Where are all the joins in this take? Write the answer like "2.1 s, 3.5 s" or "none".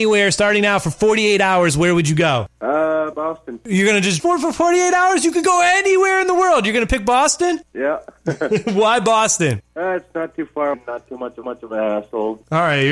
3.1 s, 4.2 s, 10.7 s, 11.4 s